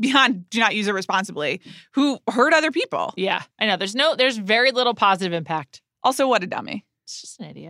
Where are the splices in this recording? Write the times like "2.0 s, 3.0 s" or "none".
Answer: 3.5 s